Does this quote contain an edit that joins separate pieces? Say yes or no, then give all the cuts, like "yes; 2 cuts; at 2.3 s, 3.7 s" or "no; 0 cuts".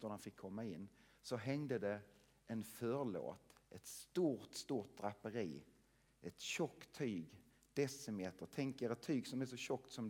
no; 0 cuts